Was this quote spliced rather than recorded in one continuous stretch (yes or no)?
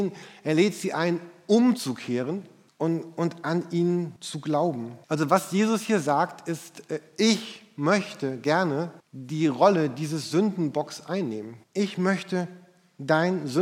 yes